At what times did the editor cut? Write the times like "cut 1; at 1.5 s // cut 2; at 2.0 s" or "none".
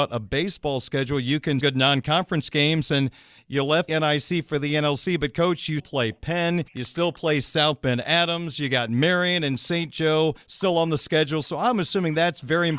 cut 1; at 1.6 s // cut 2; at 3.9 s // cut 3; at 5.8 s // cut 4; at 6.7 s // cut 5; at 10.4 s

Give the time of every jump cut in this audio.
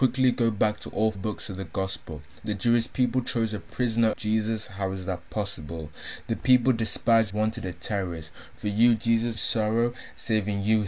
cut 1; at 1.1 s // cut 2; at 4.1 s // cut 3; at 7.3 s // cut 4; at 9.3 s

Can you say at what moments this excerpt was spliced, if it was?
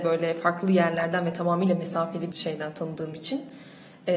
cut 1; at 2.3 s

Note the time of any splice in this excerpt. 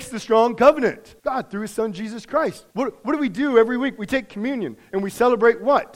cut 1; at 1.2 s // cut 2; at 2.7 s

